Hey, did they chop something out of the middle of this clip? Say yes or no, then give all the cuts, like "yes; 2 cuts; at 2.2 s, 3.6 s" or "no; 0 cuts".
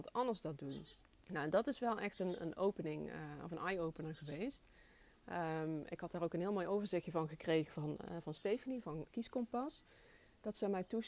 yes; 2 cuts; at 1.0 s, 9.1 s